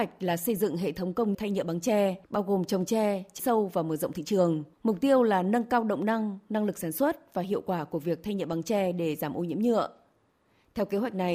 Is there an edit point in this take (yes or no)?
yes